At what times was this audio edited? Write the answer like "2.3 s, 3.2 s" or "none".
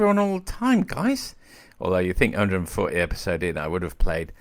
none